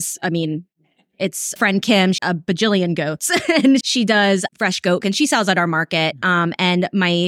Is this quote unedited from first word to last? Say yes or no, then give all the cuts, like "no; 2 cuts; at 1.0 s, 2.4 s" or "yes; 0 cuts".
no; 5 cuts; at 1.6 s, 2.2 s, 3.8 s, 4.5 s, 5.0 s